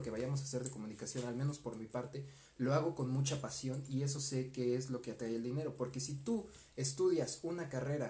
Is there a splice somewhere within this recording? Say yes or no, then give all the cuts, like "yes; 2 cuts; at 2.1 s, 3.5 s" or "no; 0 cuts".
no; 0 cuts